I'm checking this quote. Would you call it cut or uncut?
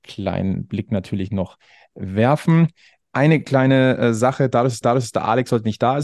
cut